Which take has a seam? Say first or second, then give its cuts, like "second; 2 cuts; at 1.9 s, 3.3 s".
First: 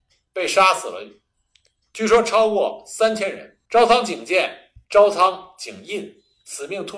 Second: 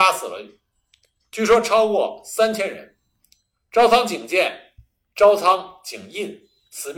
first; 2 cuts; at 3.7 s, 4.8 s